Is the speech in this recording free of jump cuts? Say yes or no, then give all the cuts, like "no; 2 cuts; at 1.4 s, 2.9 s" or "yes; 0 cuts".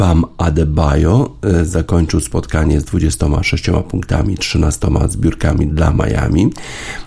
yes; 0 cuts